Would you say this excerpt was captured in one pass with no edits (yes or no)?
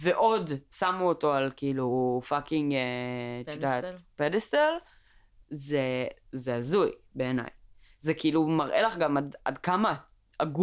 yes